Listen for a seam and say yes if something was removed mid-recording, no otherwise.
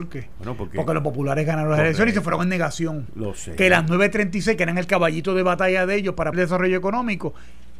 yes